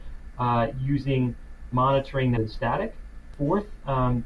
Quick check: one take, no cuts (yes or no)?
no